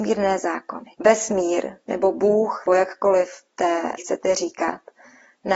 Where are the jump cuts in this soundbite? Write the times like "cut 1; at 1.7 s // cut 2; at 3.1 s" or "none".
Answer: cut 1; at 0.9 s // cut 2; at 2.7 s // cut 3; at 4.0 s